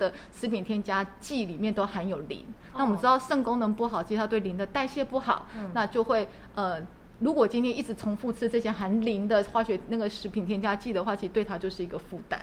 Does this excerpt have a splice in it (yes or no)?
no